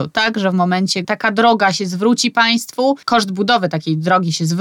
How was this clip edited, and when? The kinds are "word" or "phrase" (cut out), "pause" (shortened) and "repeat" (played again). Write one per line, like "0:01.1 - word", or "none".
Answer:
0:01.0 - word
0:03.0 - pause